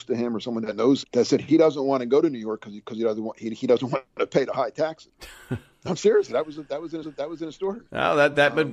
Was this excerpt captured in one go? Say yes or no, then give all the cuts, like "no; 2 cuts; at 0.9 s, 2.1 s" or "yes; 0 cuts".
no; 3 cuts; at 1.0 s, 5.7 s, 7.0 s